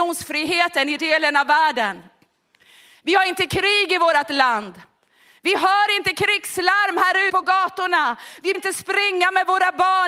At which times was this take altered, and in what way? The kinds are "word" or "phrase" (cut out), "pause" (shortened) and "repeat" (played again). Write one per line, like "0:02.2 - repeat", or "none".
0:01.0 - phrase
0:07.3 - word
0:08.5 - word

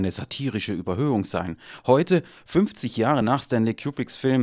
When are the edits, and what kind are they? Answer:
none

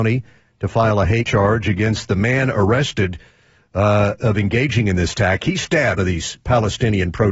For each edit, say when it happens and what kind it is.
0:01.3 - word
0:06.0 - word

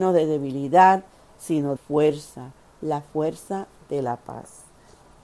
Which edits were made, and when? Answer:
0:01.8 - word

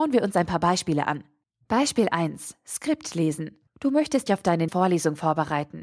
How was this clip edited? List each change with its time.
0:01.4 - pause
0:03.7 - pause
0:04.3 - word
0:04.7 - word

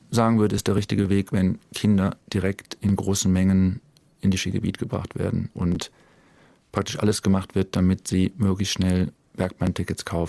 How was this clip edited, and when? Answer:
none

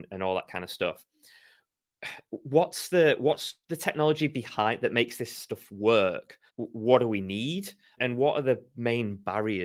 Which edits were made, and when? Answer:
0:03.6 - pause
0:06.5 - pause
0:08.0 - word

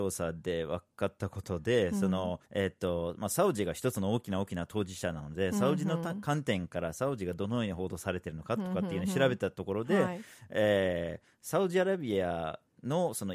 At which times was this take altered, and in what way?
0:02.4 - pause

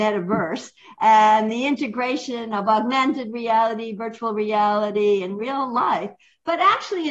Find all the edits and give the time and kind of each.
none

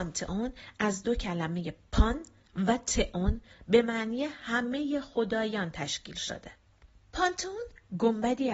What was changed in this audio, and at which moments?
0:06.9 - pause

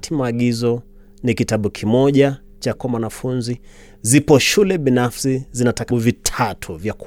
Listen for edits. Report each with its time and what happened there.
0:02.8 - word
0:05.9 - word

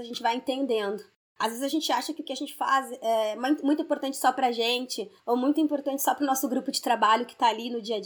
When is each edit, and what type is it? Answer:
none

